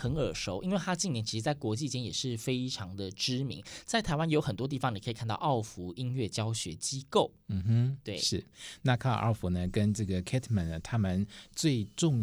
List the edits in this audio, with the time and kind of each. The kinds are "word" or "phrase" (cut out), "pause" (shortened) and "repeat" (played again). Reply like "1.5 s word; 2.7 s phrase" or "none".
none